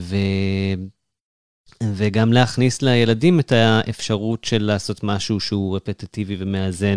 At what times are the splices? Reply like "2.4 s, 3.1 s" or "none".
none